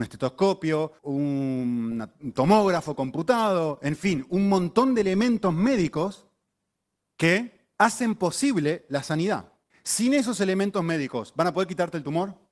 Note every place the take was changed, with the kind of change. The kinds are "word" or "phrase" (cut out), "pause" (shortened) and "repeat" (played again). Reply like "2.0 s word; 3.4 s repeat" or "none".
1.0 s pause; 7.7 s pause; 9.7 s pause